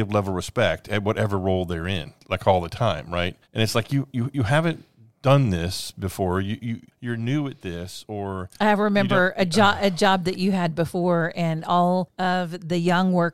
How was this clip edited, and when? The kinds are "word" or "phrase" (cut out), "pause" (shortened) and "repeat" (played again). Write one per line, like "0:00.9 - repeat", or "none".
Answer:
0:03.4 - pause